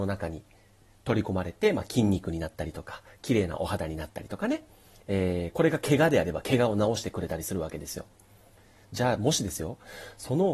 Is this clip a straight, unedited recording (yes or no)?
yes